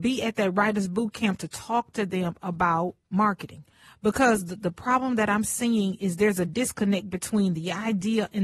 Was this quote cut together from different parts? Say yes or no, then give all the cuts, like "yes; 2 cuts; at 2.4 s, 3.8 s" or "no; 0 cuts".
no; 0 cuts